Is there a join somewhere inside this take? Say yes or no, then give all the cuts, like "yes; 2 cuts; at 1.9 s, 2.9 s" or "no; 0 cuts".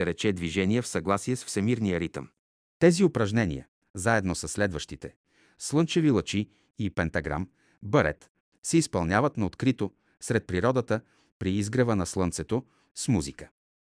no; 0 cuts